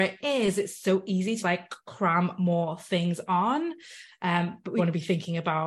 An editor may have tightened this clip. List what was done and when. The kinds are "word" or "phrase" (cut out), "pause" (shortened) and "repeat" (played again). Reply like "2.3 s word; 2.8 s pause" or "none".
1.4 s word; 4.8 s word